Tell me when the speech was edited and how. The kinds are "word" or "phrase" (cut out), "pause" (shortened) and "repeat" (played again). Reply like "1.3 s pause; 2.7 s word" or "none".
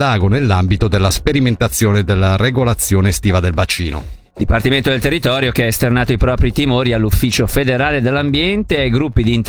none